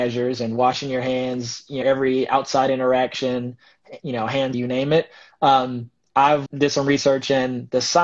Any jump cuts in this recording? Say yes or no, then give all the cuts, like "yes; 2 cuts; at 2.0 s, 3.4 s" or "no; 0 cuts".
yes; 3 cuts; at 1.8 s, 4.5 s, 6.5 s